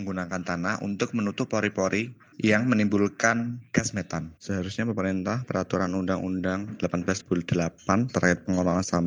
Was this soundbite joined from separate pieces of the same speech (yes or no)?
yes